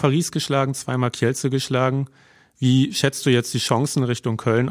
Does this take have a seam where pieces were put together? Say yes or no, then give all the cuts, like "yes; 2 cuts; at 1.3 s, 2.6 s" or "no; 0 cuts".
no; 0 cuts